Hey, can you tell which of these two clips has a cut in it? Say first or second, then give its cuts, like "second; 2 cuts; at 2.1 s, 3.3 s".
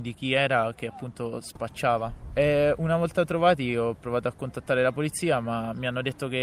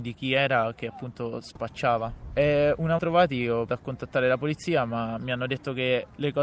second; 2 cuts; at 3.0 s, 3.7 s